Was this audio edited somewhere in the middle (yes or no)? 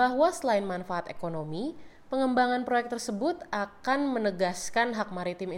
no